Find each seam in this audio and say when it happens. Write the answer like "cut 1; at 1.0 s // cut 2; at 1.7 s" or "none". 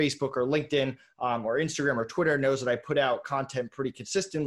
none